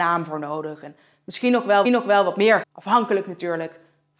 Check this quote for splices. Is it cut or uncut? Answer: cut